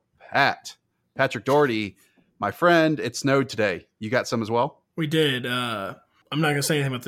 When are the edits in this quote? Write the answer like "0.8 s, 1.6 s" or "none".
none